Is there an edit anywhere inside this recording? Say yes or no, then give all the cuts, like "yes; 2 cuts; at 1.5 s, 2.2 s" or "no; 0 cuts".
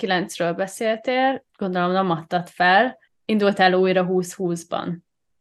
yes; 2 cuts; at 1.5 s, 3.1 s